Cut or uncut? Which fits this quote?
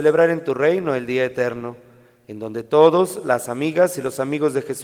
uncut